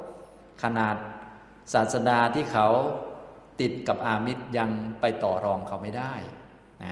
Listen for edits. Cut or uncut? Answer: uncut